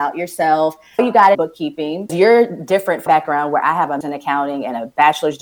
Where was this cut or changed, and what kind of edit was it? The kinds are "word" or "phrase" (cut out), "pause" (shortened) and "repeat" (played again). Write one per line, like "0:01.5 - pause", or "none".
0:01.0 - word
0:01.3 - word
0:02.1 - word
0:03.1 - word
0:04.0 - word